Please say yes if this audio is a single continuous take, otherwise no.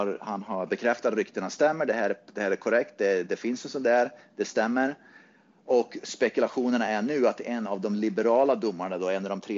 yes